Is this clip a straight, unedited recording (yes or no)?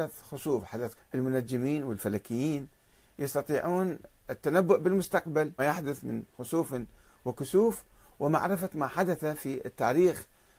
no